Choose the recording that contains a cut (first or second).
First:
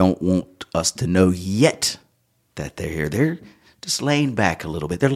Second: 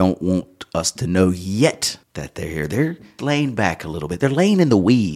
second